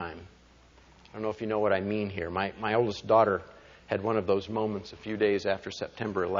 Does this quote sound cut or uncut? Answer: uncut